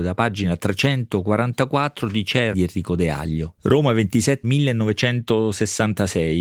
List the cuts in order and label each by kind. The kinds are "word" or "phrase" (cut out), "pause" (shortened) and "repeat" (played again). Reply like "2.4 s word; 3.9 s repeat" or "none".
2.5 s phrase; 3.6 s pause; 4.4 s word